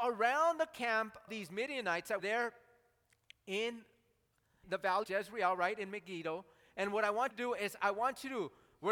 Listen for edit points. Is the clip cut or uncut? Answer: cut